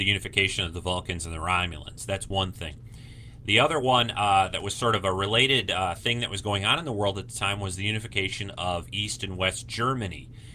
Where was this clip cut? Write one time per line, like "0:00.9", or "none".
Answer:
none